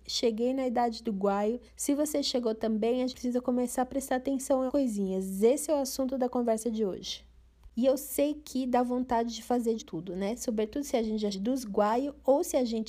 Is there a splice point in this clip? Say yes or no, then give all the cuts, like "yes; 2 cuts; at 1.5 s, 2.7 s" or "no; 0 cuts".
yes; 6 cuts; at 1.7 s, 3.1 s, 4.7 s, 7.7 s, 9.8 s, 11.3 s